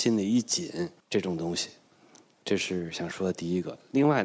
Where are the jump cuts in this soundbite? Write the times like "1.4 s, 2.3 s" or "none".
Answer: 1.0 s